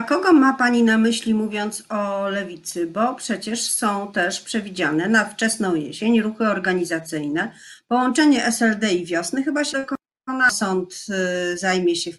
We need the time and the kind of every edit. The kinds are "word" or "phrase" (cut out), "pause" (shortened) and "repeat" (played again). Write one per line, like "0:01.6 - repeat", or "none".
0:09.7 - word